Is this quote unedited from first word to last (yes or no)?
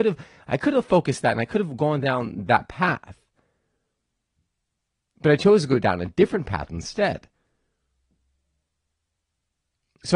yes